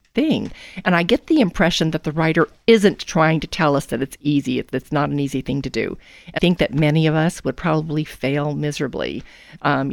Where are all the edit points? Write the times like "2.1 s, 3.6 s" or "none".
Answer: 6.4 s